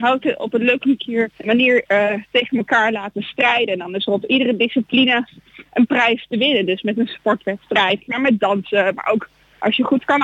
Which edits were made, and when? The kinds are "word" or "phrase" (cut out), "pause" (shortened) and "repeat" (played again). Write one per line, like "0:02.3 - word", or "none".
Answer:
0:01.4 - pause